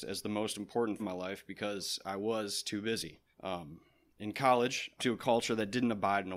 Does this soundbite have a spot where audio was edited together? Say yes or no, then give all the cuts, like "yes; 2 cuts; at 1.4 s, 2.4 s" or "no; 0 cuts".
yes; 3 cuts; at 1.0 s, 3.3 s, 5.0 s